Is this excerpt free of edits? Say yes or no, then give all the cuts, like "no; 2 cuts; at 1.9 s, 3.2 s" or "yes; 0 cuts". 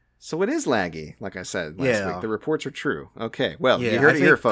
yes; 0 cuts